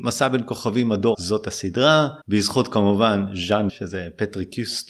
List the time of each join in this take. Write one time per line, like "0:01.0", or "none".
0:01.1
0:02.2
0:03.7